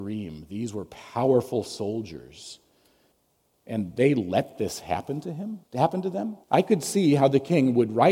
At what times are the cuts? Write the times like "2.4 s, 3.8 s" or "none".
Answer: 3.1 s, 5.6 s, 6.4 s